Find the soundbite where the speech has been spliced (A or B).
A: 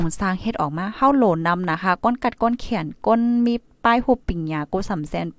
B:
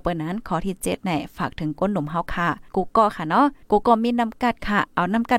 B